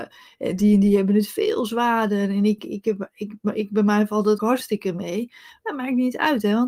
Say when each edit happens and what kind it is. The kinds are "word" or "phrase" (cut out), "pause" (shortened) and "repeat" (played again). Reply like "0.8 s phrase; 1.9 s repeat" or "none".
4.4 s phrase